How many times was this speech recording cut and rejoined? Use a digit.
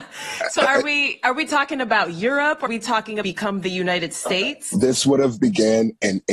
2